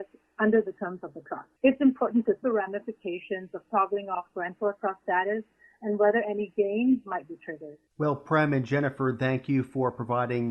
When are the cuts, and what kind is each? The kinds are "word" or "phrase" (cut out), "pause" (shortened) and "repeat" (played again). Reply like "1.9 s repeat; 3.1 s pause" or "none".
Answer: 1.6 s pause; 2.4 s phrase; 7.9 s pause